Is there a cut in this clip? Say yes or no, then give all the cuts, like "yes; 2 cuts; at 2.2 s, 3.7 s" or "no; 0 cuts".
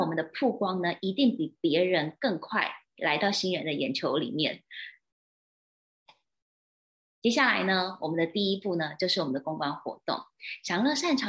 no; 0 cuts